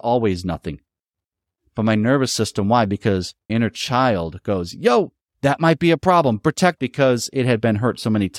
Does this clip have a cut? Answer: yes; 2 cuts; at 3.5 s, 6.8 s

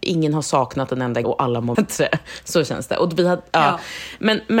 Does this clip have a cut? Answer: yes; 2 cuts; at 1.2 s, 1.7 s

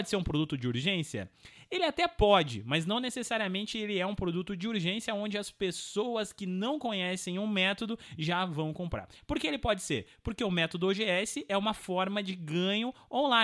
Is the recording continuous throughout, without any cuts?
yes; 0 cuts

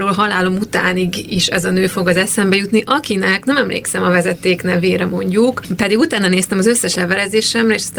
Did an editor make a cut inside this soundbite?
no; 0 cuts

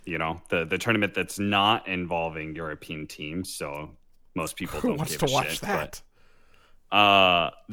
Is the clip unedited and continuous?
yes; 0 cuts

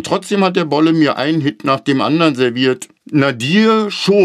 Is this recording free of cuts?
no; 1 cut; at 3.0 s

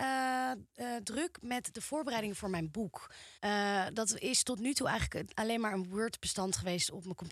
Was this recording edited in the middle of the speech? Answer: yes; 1 cut; at 3.4 s

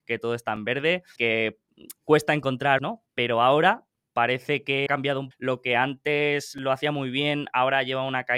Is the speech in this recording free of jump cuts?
no; 4 cuts; at 1.2 s, 2.8 s, 4.9 s, 5.3 s

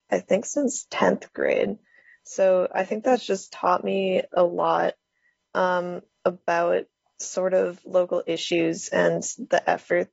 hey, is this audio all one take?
yes; 0 cuts

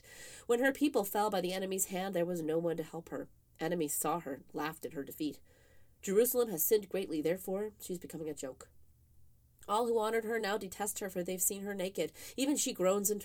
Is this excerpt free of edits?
yes; 0 cuts

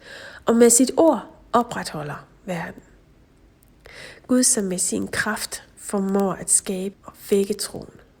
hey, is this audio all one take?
no; 1 cut; at 6.9 s

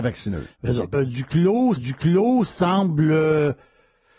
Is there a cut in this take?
yes; 2 cuts; at 0.9 s, 1.8 s

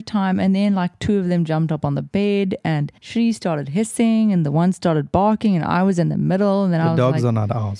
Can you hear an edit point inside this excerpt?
yes; 1 cut; at 3.0 s

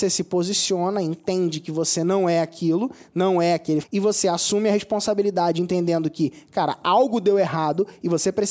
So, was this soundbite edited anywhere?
yes; 1 cut; at 3.8 s

